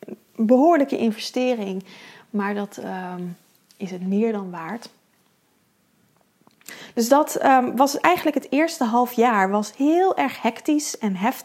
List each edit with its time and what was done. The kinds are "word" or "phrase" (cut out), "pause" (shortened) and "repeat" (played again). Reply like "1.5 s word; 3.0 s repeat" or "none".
none